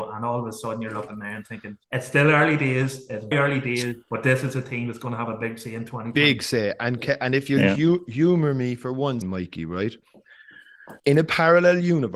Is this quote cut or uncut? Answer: cut